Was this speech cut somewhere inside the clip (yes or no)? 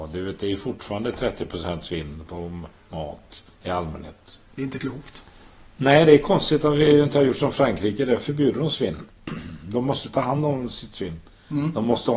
yes